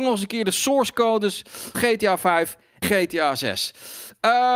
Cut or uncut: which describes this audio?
cut